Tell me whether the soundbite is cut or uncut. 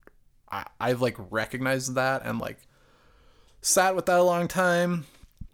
uncut